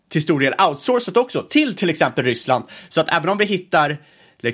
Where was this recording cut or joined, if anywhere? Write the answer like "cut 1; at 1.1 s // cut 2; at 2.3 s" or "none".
none